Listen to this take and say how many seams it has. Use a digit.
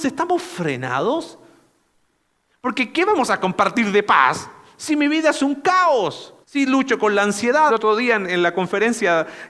2